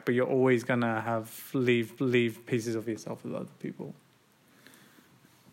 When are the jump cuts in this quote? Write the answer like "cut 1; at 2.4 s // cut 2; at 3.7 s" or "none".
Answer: cut 1; at 2.0 s